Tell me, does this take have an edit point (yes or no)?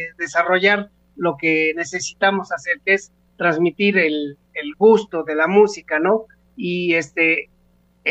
no